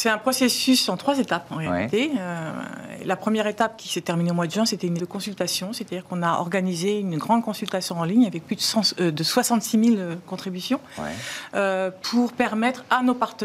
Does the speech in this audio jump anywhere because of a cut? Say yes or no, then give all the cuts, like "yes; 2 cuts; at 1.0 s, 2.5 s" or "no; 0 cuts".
yes; 1 cut; at 5.0 s